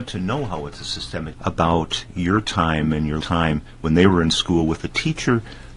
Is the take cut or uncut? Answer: cut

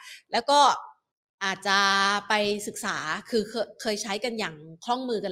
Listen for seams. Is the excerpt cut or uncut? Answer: cut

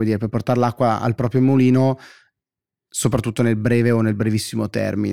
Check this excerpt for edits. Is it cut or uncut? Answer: uncut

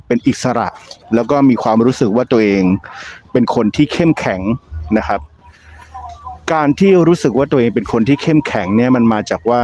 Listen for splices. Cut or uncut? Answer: cut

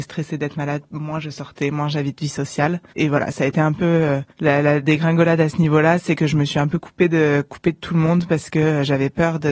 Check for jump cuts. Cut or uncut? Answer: cut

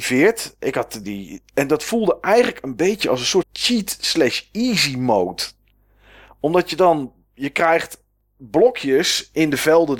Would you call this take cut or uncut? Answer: cut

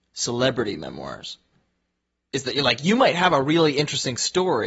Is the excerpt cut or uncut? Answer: uncut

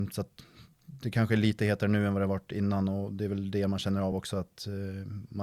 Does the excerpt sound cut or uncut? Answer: uncut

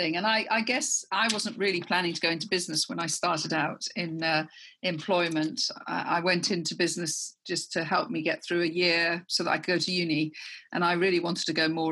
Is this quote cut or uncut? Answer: uncut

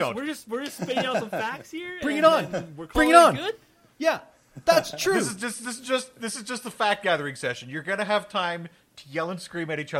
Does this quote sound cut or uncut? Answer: uncut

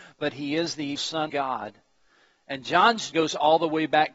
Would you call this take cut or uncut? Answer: cut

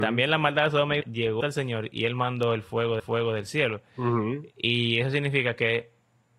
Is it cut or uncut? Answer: cut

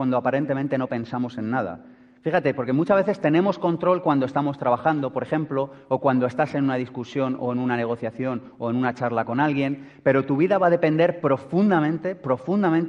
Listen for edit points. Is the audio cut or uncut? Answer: uncut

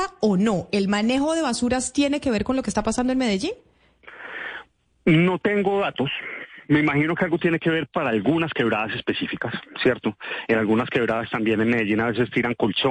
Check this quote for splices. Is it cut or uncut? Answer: uncut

